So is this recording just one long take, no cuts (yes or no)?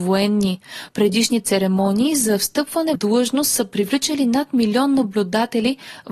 no